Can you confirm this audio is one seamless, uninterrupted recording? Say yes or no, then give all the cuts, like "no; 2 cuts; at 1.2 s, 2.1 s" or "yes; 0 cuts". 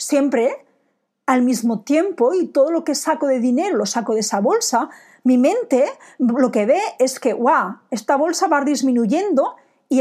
yes; 0 cuts